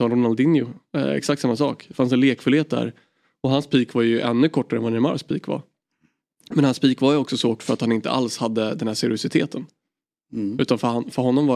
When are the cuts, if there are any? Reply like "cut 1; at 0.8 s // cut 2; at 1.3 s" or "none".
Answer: cut 1; at 7.6 s